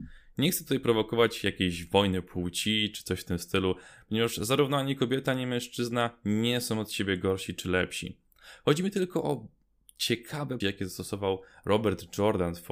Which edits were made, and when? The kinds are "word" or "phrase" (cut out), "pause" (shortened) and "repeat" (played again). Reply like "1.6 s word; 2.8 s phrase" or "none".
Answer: 10.6 s word

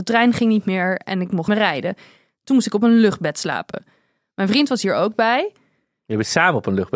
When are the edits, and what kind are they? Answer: 1.5 s word

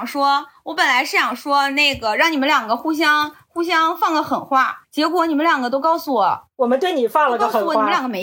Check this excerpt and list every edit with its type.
4.8 s pause

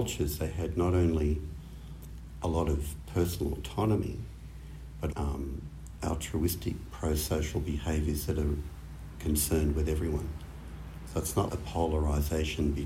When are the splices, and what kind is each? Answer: 2.4 s word; 5.1 s word; 6.0 s word; 11.5 s word

